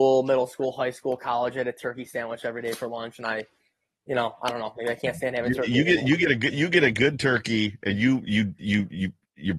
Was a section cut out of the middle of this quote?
no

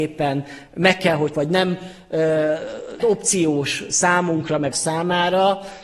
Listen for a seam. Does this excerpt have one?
yes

